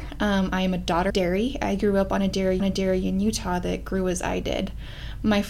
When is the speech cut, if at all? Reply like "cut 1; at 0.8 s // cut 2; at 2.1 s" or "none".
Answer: cut 1; at 1.1 s // cut 2; at 2.6 s